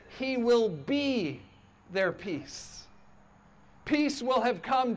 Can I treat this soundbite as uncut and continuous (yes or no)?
yes